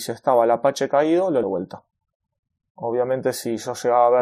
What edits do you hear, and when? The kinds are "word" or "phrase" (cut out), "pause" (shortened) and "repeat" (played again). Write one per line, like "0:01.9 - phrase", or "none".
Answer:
0:01.4 - phrase